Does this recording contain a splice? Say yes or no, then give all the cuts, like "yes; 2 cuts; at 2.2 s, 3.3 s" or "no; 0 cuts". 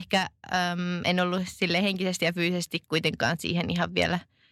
no; 0 cuts